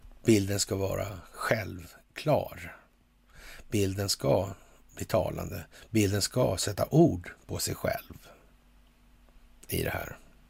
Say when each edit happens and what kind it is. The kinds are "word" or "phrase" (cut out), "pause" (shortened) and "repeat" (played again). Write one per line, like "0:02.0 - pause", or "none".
none